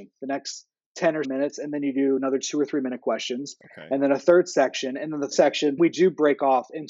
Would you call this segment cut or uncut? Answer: cut